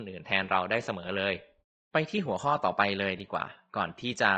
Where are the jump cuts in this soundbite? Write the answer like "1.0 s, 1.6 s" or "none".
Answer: 1.6 s